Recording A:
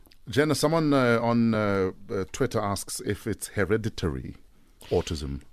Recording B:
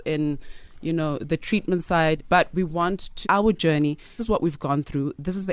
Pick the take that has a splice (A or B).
B